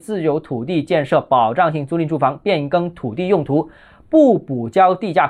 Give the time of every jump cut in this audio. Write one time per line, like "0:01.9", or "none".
none